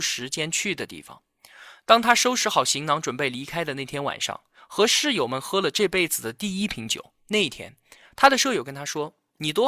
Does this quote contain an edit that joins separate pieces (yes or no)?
yes